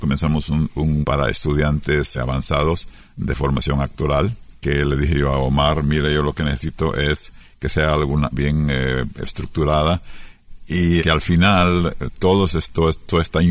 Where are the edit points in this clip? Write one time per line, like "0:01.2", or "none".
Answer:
0:01.0
0:02.1
0:04.6
0:08.3
0:11.0